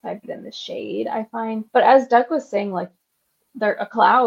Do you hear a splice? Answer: yes; 1 cut; at 1.7 s

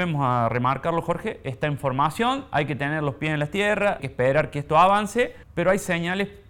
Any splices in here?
yes; 2 cuts; at 4.0 s, 5.4 s

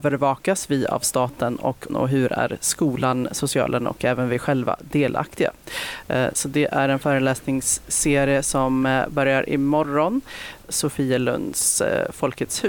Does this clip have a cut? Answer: yes; 2 cuts; at 1.9 s, 10.6 s

